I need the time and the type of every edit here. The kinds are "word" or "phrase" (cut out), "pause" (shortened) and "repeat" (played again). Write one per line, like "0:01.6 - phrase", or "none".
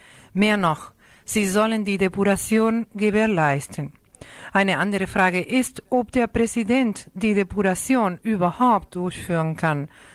none